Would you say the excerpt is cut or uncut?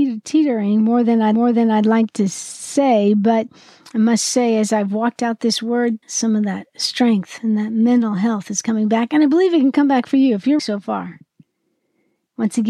cut